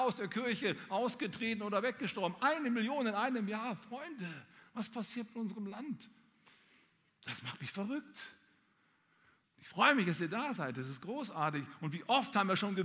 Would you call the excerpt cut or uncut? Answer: uncut